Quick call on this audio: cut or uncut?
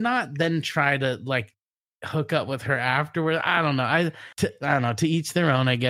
cut